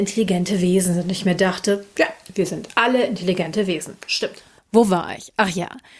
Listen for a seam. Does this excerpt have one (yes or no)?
no